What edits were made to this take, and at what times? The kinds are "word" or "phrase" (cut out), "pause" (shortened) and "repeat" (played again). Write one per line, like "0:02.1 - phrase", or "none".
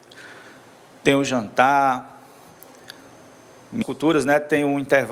0:03.8 - word